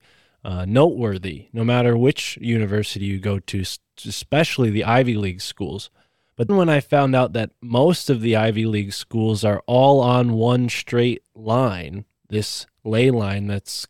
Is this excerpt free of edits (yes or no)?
no